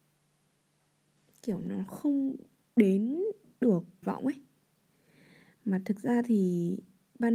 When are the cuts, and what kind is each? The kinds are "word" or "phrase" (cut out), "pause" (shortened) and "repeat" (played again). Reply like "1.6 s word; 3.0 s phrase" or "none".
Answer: 4.0 s phrase